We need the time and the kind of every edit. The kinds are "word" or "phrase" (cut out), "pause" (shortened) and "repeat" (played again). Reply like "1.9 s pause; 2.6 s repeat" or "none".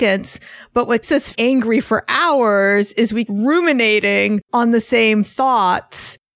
1.0 s word; 1.3 s word; 3.3 s word; 4.4 s pause

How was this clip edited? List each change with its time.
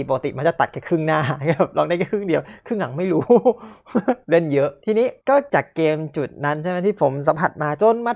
4.2 s pause

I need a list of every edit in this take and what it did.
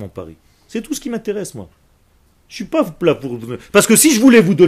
none

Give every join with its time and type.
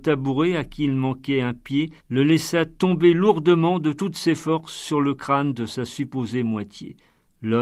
2.0 s pause

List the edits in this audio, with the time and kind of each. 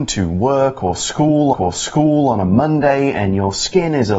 1.5 s repeat

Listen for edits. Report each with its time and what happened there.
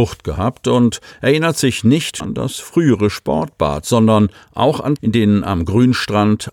2.2 s word; 5.0 s word

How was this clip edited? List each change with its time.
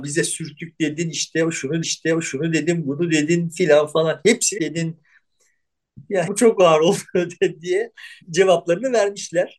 1.8 s repeat; 4.6 s phrase; 6.3 s phrase; 8.2 s pause

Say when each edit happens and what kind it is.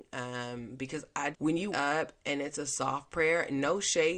1.3 s phrase; 1.7 s word

